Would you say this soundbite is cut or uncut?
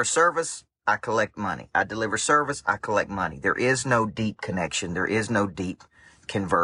uncut